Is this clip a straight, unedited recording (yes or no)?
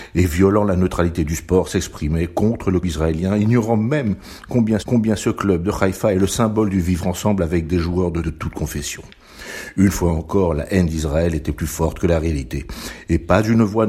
no